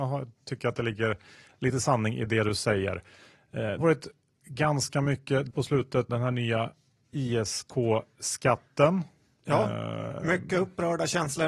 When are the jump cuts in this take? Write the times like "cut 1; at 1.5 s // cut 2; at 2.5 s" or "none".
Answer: cut 1; at 3.8 s // cut 2; at 5.5 s // cut 3; at 6.1 s

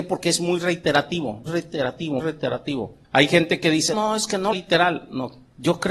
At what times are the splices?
cut 1; at 1.5 s // cut 2; at 2.2 s // cut 3; at 3.0 s // cut 4; at 3.9 s // cut 5; at 4.5 s

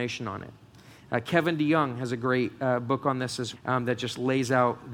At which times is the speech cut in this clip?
cut 1; at 3.5 s

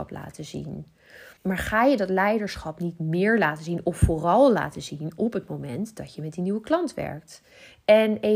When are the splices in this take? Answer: cut 1; at 1.4 s

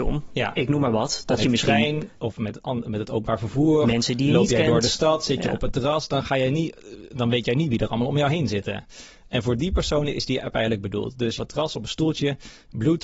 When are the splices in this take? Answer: cut 1; at 1.4 s // cut 2; at 11.4 s

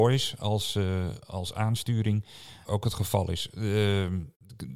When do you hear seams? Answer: cut 1; at 2.6 s

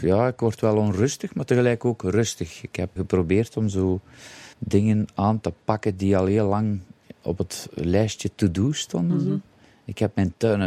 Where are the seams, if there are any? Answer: cut 1; at 3.0 s // cut 2; at 4.5 s // cut 3; at 7.1 s

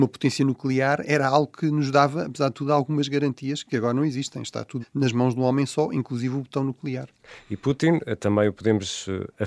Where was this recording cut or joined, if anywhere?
cut 1; at 4.8 s

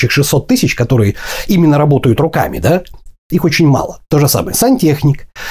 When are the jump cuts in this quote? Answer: none

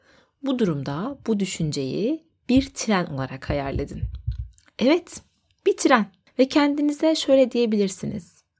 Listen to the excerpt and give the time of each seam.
none

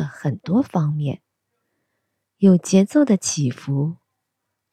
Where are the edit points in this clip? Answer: none

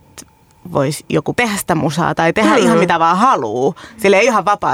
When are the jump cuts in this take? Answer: cut 1; at 1.3 s

